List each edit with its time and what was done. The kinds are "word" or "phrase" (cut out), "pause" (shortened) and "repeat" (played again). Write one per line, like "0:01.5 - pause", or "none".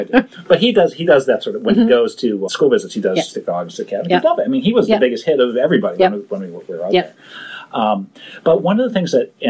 0:02.5 - word